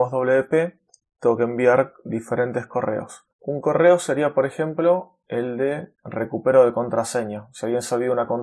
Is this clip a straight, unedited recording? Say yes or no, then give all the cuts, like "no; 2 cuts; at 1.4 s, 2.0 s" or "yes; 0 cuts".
no; 2 cuts; at 3.3 s, 5.9 s